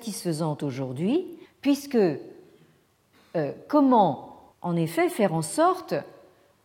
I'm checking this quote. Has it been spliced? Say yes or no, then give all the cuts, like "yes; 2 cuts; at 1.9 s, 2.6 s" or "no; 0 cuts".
yes; 2 cuts; at 1.5 s, 4.5 s